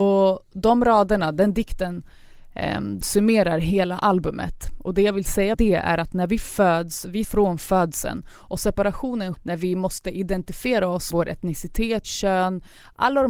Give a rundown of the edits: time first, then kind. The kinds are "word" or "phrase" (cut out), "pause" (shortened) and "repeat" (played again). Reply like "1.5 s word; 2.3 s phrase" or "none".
3.0 s word; 5.5 s word; 7.2 s word; 9.3 s word; 11.1 s word; 12.0 s word